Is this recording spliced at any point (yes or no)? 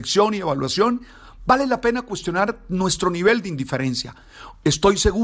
no